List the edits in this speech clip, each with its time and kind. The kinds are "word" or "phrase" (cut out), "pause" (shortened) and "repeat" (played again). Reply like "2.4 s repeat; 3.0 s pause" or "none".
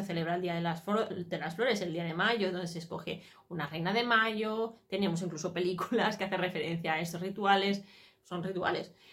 none